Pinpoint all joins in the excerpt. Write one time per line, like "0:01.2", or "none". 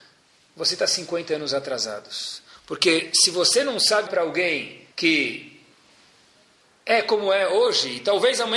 0:04.1
0:04.9